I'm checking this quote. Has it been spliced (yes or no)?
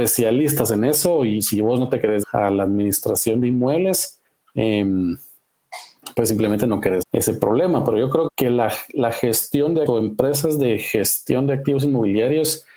yes